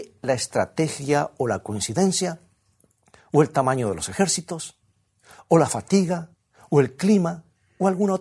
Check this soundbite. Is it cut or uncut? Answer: uncut